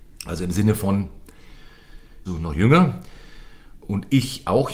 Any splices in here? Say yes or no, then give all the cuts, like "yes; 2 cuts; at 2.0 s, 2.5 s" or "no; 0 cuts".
yes; 1 cut; at 2.3 s